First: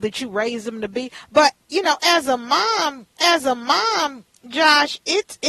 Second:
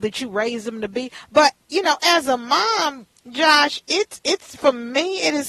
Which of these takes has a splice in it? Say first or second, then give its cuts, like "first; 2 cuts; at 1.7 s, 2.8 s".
first; 1 cut; at 3.2 s